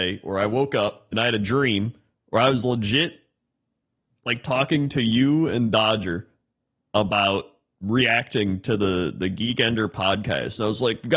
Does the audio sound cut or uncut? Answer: uncut